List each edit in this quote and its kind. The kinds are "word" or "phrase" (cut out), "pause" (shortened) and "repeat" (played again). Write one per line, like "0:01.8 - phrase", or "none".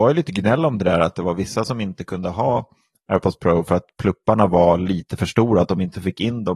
none